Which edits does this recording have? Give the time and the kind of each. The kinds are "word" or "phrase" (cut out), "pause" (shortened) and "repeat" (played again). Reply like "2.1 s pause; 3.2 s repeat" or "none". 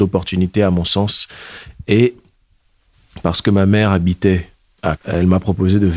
5.0 s word